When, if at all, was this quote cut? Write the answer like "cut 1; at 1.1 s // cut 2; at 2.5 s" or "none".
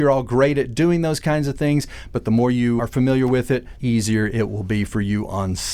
cut 1; at 2.8 s // cut 2; at 3.8 s